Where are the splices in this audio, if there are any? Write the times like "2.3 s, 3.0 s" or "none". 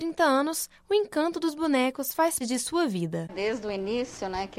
2.4 s